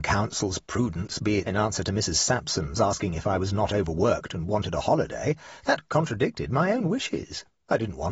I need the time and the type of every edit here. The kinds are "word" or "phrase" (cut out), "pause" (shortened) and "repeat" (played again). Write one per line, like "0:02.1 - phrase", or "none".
0:01.5 - word
0:05.9 - word